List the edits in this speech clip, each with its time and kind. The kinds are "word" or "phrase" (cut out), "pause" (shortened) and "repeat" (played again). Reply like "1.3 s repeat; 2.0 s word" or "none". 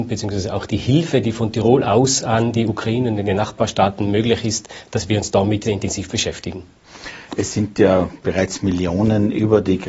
5.7 s word